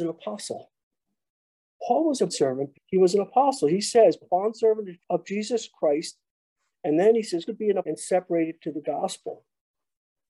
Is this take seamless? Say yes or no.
no